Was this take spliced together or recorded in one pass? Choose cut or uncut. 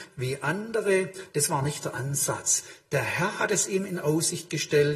uncut